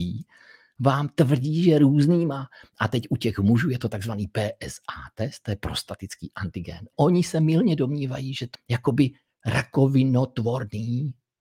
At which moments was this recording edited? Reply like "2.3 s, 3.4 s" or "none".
6.9 s, 8.5 s